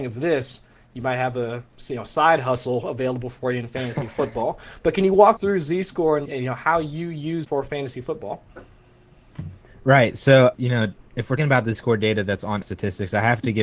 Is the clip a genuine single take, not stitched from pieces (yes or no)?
no